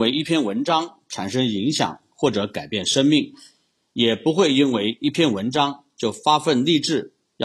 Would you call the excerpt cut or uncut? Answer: uncut